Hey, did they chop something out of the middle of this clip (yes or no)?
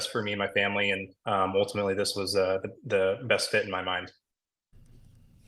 yes